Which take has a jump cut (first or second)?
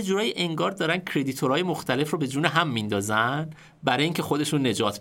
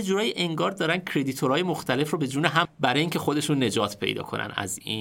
second